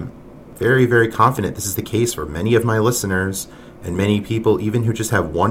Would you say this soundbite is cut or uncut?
uncut